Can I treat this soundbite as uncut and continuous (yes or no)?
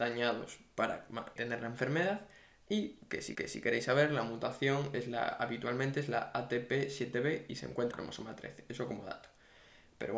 no